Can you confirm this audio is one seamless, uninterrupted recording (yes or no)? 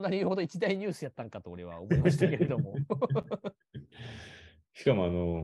no